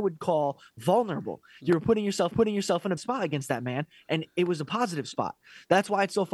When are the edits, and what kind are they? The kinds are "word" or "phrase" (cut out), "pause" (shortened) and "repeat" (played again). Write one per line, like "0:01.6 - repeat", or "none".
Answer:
0:02.3 - repeat
0:03.0 - word